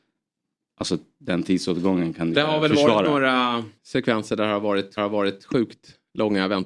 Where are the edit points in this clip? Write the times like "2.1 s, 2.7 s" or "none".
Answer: 2.3 s, 3.8 s, 5.0 s

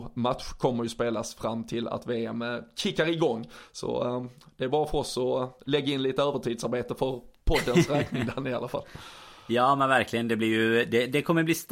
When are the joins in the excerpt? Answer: none

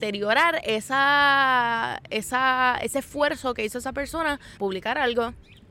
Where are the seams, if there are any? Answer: 4.6 s

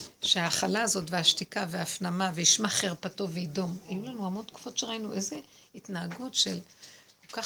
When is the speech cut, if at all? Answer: none

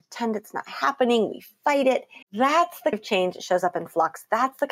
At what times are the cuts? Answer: 2.2 s, 2.9 s

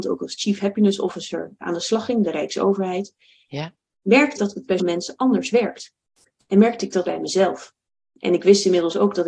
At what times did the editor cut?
1.6 s, 2.2 s, 4.4 s, 4.8 s, 7.0 s

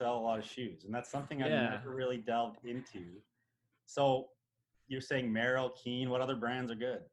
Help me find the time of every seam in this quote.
none

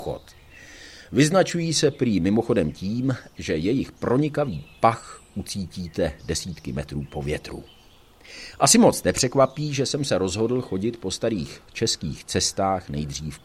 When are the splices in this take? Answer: none

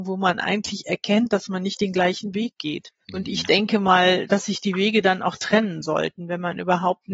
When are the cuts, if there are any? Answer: 3.0 s

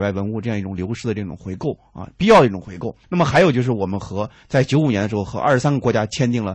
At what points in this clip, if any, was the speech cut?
3.0 s

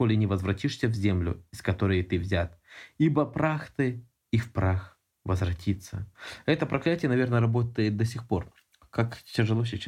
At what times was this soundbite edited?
none

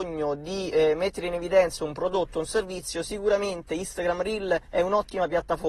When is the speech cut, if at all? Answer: 4.6 s

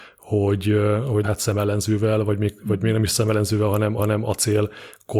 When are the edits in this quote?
1.2 s, 4.0 s

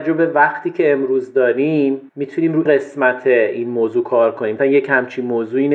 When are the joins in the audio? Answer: 2.1 s, 2.6 s, 4.6 s

